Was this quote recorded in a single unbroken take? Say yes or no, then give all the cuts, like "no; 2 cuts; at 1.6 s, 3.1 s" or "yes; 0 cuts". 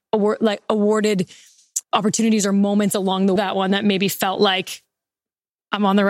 no; 2 cuts; at 1.8 s, 3.4 s